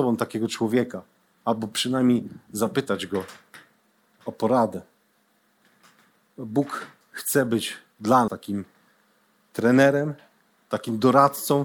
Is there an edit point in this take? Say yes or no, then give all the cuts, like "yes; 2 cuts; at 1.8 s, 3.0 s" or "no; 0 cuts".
yes; 1 cut; at 8.3 s